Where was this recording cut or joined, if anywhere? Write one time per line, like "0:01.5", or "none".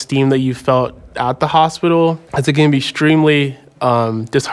0:02.3